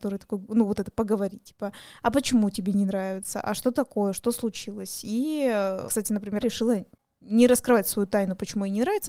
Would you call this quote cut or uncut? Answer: cut